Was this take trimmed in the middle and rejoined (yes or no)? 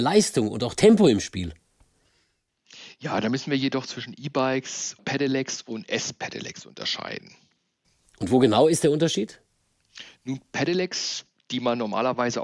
yes